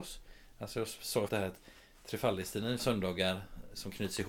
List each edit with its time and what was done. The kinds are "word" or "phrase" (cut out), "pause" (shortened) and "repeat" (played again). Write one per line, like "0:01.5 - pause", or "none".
0:01.3 - word
0:02.8 - phrase